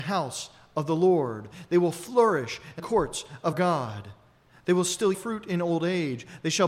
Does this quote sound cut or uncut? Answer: cut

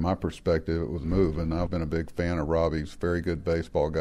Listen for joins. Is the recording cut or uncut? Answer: cut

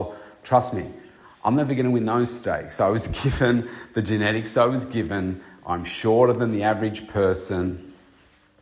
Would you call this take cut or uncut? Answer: uncut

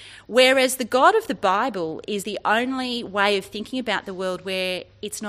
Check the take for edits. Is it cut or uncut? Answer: cut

